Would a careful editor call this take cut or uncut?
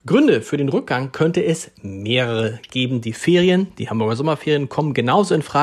uncut